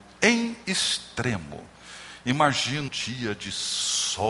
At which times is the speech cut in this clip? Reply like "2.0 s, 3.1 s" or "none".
2.9 s